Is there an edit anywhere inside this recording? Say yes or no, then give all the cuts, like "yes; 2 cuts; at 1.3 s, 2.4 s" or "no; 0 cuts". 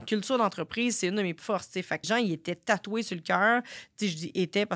yes; 2 cuts; at 1.4 s, 2.0 s